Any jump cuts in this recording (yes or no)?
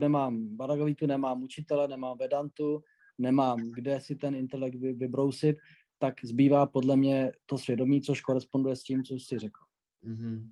no